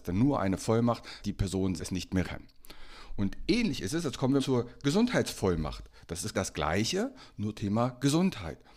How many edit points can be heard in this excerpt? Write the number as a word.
six